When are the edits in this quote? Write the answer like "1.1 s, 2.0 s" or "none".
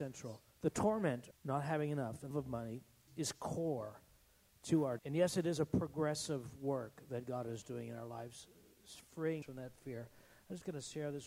1.3 s, 2.3 s, 3.1 s, 5.0 s, 9.4 s